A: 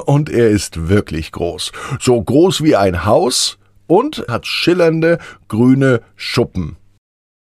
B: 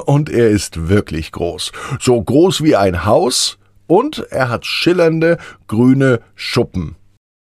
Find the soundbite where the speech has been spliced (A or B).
A